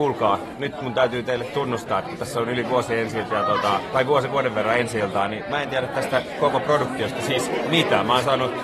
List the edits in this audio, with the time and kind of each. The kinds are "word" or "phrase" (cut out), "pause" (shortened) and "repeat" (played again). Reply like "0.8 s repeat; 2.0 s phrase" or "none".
3.3 s word